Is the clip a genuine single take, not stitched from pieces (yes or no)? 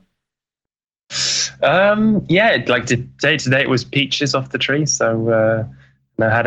yes